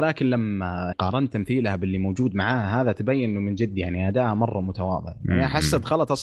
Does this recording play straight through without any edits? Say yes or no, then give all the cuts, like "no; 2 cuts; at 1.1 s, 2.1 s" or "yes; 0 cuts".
no; 1 cut; at 0.9 s